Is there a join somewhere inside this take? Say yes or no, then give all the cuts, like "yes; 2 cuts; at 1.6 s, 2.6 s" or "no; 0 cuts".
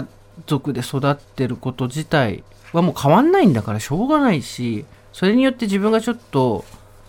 yes; 1 cut; at 1.2 s